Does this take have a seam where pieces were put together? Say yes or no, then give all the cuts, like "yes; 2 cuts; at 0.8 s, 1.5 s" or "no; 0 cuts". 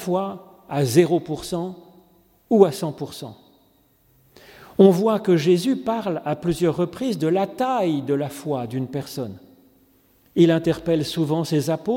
no; 0 cuts